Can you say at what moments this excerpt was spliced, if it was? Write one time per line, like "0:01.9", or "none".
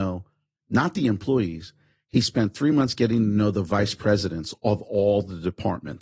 none